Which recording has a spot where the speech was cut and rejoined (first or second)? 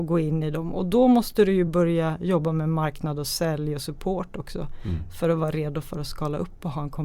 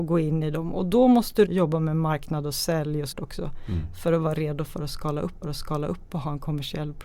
second